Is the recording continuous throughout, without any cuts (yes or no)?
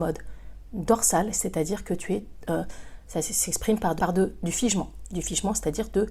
no